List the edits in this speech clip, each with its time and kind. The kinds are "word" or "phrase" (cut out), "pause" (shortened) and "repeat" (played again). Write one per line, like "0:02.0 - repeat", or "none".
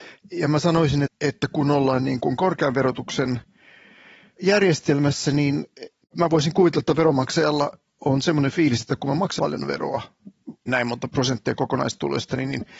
0:01.0 - word
0:07.9 - pause
0:09.4 - word
0:10.7 - word